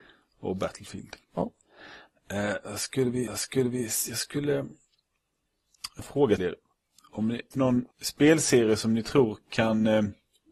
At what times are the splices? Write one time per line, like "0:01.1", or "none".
0:01.2
0:03.3
0:06.0
0:06.4
0:07.5
0:07.9

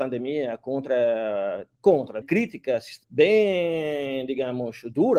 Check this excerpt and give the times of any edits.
0:02.2
0:03.0

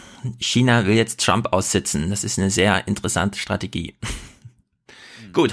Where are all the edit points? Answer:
none

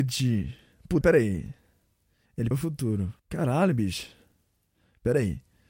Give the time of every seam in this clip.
0:01.0
0:02.5
0:03.2

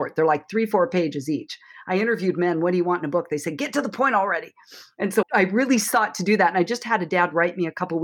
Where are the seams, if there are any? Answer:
0:05.2

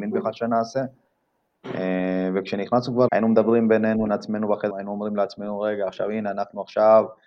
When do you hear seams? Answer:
0:03.1
0:04.1
0:04.7

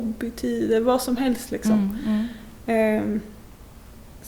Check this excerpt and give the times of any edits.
none

